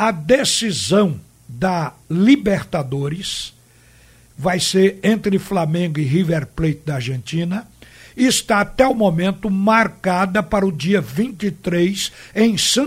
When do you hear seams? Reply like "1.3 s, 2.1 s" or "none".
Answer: none

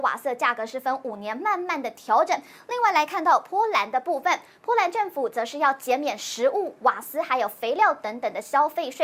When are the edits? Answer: none

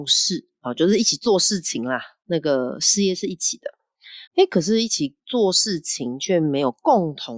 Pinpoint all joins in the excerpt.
4.3 s

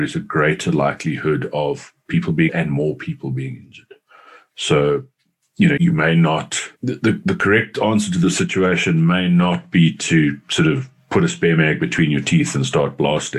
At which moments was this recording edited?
2.5 s, 5.8 s, 6.8 s

